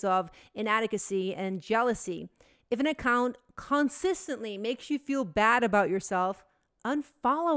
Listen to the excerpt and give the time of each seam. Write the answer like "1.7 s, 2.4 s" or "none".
none